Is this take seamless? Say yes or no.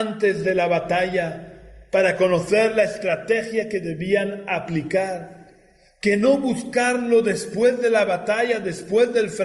yes